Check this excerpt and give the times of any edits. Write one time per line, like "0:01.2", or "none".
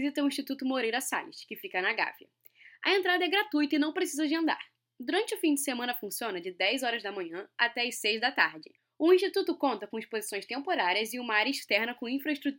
0:08.8